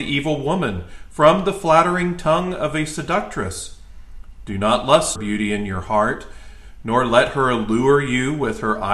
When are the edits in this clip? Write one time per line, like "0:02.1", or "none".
0:05.2